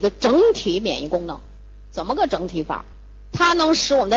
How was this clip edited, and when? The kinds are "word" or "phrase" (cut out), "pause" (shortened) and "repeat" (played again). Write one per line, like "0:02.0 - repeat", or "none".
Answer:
none